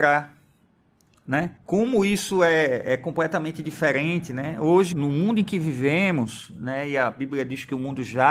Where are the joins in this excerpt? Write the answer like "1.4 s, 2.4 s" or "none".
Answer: 1.6 s, 4.9 s